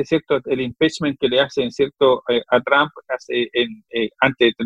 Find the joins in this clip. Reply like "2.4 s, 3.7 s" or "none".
none